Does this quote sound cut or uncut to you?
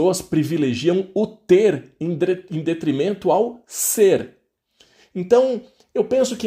uncut